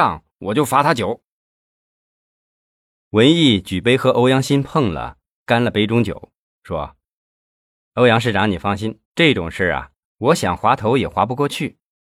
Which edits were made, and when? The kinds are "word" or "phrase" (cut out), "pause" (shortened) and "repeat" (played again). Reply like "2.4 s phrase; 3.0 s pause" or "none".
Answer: 9.0 s pause